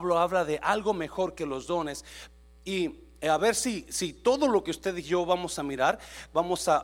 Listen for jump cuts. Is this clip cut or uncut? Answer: uncut